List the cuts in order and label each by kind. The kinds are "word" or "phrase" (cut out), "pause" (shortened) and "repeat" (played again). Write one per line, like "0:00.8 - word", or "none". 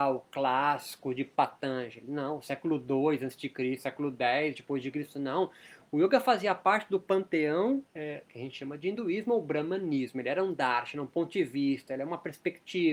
0:07.9 - pause